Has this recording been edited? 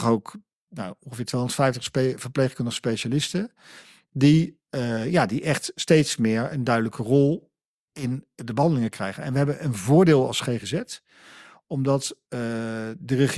no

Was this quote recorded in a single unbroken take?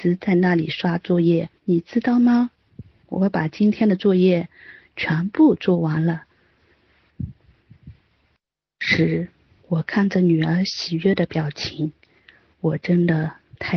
no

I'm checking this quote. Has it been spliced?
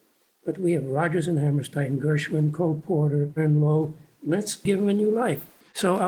yes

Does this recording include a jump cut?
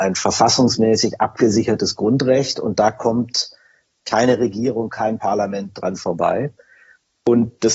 no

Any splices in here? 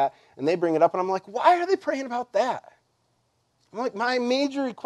no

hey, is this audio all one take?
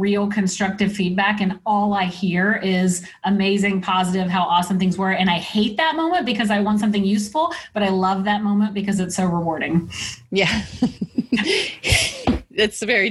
yes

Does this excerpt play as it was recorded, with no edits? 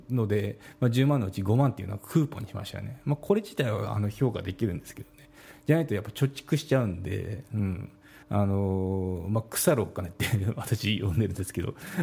no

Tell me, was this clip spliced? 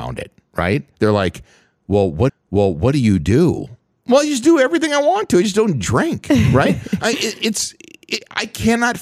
yes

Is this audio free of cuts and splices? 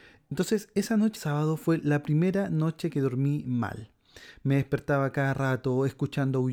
no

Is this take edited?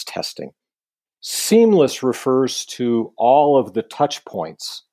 no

